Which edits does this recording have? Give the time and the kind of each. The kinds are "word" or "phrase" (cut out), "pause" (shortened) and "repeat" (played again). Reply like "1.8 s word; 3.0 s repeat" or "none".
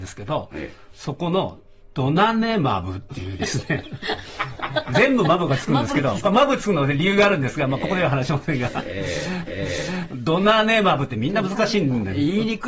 9.5 s repeat